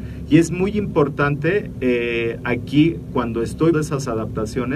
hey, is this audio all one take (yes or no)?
no